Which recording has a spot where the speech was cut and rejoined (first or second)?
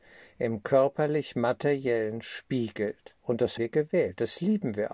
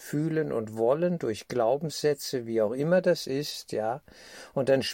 first